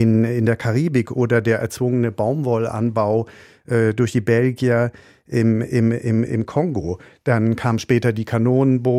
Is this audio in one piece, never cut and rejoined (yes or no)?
yes